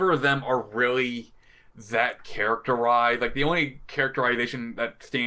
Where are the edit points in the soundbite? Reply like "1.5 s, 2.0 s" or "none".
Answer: none